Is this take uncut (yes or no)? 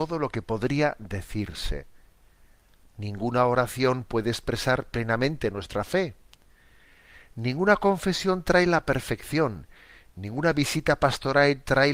yes